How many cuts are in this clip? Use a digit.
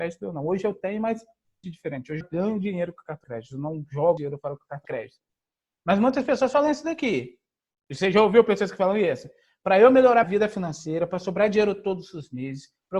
6